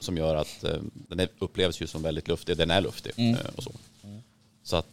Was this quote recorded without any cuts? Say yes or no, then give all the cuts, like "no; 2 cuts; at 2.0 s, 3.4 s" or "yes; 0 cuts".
no; 1 cut; at 1.1 s